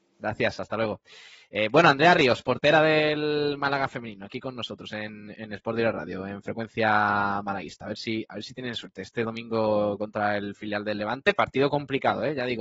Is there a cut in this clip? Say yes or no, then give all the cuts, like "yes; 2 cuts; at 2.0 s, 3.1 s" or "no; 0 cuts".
no; 0 cuts